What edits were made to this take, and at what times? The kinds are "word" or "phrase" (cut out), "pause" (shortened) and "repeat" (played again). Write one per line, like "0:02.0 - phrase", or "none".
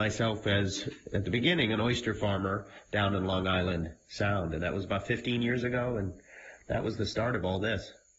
none